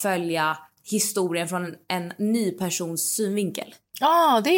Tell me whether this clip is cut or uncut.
uncut